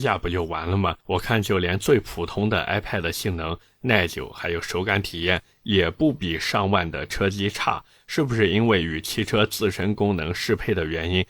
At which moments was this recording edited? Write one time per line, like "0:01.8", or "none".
0:01.0